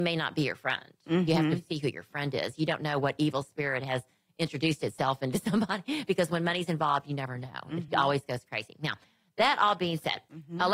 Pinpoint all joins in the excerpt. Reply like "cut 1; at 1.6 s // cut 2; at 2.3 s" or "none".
none